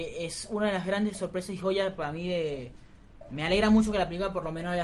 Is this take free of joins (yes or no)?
yes